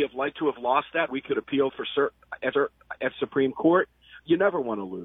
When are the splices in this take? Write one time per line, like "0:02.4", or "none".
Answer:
0:01.1
0:01.7
0:02.5